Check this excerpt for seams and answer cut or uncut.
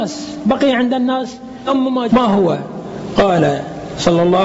cut